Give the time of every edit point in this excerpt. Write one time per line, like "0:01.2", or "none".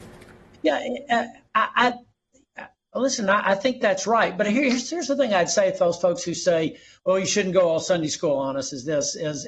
none